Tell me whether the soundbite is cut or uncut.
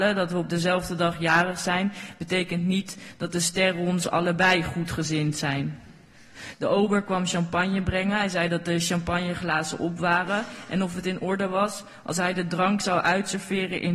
uncut